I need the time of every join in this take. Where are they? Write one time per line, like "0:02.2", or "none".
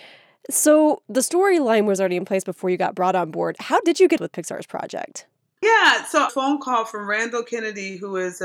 0:04.2
0:06.3

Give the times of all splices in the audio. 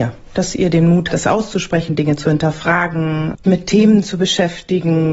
0:01.1
0:03.4

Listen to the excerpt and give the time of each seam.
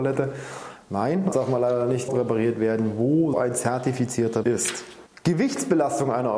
0:01.3
0:02.1
0:03.3
0:04.4

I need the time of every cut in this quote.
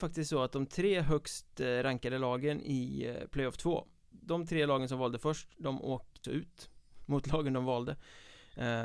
0:04.1
0:06.2

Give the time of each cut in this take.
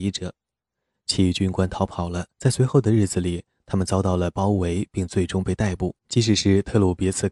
0:02.3
0:06.0

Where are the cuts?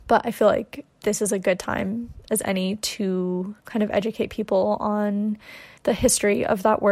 0:00.9
0:03.6
0:05.8

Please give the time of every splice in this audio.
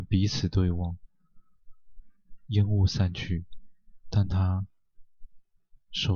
0:02.4
0:04.0

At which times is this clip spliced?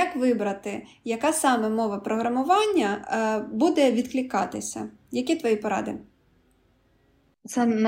none

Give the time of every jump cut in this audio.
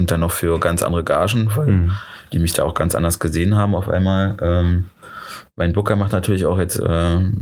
none

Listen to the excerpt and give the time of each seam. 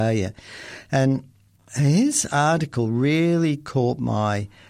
none

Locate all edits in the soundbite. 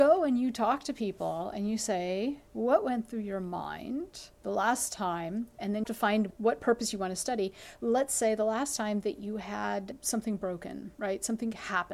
0:02.5
0:04.3
0:05.9
0:10.9

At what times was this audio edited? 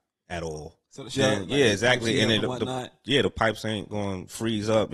0:01.2

